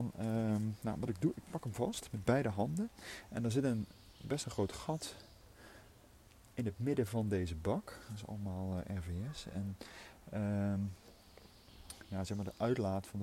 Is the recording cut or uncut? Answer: uncut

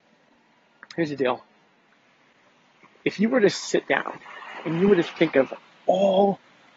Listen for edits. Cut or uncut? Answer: uncut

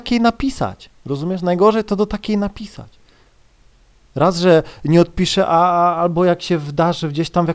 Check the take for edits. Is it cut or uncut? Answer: uncut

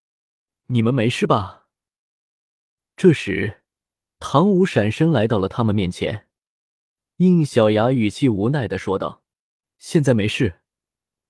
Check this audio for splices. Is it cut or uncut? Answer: uncut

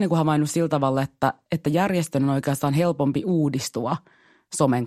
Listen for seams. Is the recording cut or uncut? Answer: uncut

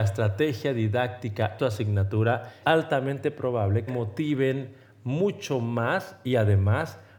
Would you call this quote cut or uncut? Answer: cut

